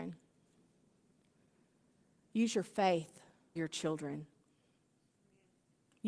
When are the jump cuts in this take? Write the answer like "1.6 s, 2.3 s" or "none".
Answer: 3.6 s